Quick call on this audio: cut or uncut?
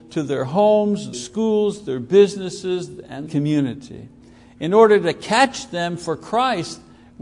cut